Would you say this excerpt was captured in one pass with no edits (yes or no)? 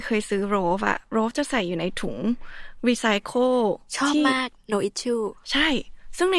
no